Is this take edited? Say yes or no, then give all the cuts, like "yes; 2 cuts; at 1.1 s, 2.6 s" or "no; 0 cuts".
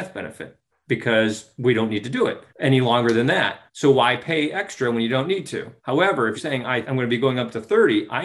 yes; 5 cuts; at 2.5 s, 3.7 s, 5.8 s, 6.4 s, 6.8 s